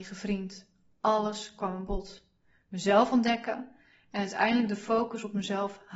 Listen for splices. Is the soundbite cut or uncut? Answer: uncut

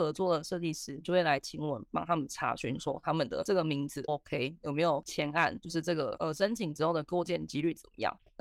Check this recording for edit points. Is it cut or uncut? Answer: cut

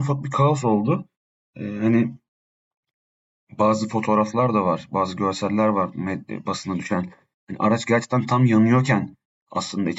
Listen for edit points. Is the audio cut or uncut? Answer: uncut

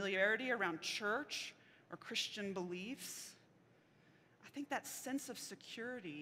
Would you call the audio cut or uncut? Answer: uncut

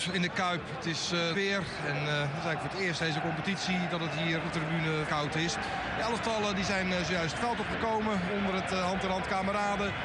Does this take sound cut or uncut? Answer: cut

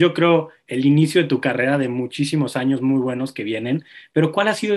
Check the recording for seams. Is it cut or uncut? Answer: uncut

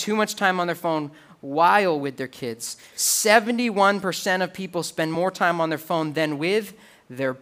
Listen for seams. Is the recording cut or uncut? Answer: uncut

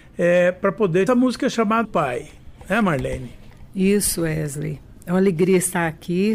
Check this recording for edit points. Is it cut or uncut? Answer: cut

